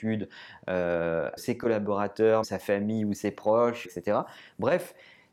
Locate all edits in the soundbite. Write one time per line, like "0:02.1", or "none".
0:01.4
0:02.4
0:03.8